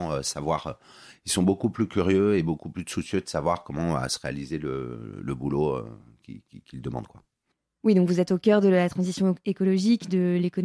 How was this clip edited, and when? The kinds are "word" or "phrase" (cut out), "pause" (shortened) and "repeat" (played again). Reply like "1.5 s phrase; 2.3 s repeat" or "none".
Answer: none

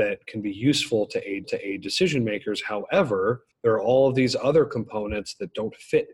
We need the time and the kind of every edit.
1.4 s repeat; 3.5 s pause

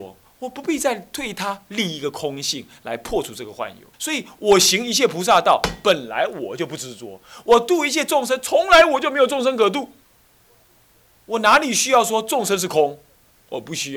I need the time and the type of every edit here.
3.9 s pause

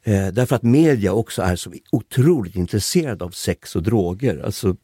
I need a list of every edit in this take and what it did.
none

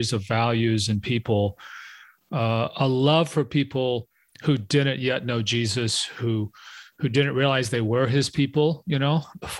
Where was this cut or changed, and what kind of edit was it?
none

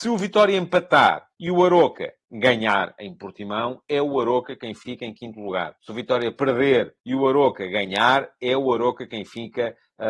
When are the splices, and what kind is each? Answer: 1.3 s pause; 5.8 s pause; 7.0 s pause

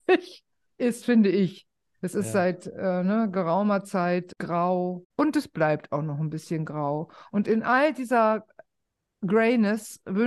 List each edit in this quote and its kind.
none

